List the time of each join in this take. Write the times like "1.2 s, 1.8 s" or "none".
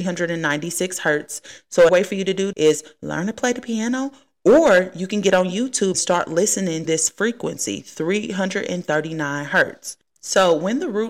1.9 s, 2.5 s, 5.9 s, 6.9 s